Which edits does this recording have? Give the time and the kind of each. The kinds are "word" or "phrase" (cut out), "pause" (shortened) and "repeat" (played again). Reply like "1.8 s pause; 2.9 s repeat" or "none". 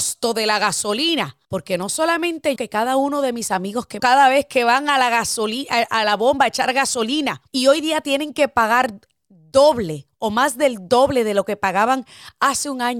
1.4 s pause; 2.6 s phrase; 4.0 s phrase; 7.5 s pause